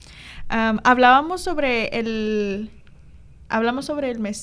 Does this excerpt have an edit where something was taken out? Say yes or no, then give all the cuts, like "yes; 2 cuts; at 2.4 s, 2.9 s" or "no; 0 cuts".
no; 0 cuts